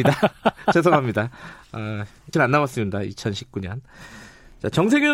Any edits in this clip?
yes; 1 cut; at 2.3 s

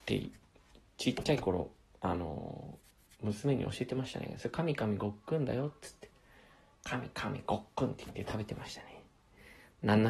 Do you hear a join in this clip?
no; 0 cuts

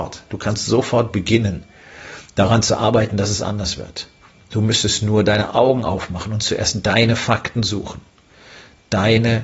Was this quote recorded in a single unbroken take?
no; 1 cut; at 4.2 s

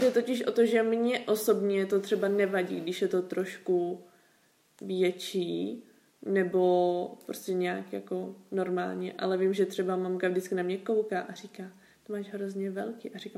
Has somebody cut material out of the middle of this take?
no; 0 cuts

